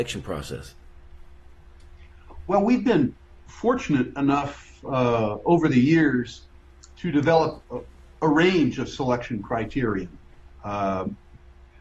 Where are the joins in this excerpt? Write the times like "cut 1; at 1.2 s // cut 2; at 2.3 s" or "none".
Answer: none